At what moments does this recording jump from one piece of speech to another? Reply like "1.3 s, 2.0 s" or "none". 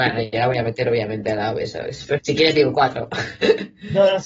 2.2 s